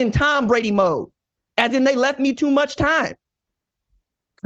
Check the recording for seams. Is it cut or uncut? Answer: uncut